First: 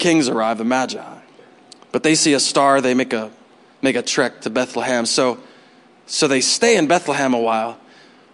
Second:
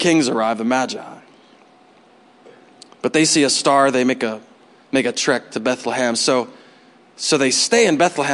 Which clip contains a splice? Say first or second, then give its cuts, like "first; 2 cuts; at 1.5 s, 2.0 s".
first; 1 cut; at 1.4 s